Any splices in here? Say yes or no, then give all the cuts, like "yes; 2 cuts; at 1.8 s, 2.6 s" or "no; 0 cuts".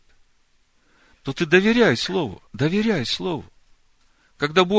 yes; 1 cut; at 2.5 s